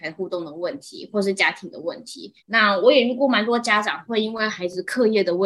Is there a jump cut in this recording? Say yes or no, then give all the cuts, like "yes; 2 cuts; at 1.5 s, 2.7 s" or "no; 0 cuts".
yes; 1 cut; at 2.4 s